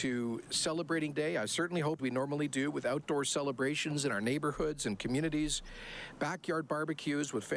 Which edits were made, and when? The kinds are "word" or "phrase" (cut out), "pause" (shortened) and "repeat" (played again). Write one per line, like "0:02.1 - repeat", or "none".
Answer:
0:01.1 - word
0:02.0 - word